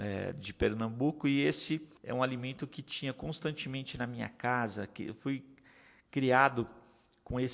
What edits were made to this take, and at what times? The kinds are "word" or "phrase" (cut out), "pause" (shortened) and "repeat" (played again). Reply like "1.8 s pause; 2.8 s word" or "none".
2.0 s pause